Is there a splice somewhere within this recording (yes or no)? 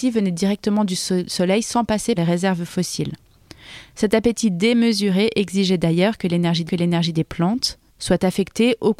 yes